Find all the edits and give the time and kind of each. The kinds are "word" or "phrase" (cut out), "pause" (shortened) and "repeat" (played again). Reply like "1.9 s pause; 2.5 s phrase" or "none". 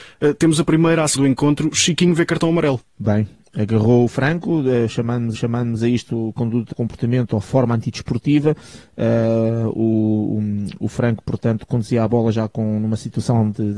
1.2 s word; 2.9 s pause; 5.3 s repeat; 6.7 s word